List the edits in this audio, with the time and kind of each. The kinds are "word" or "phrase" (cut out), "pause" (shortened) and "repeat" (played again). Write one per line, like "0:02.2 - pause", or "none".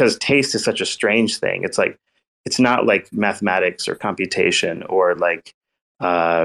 none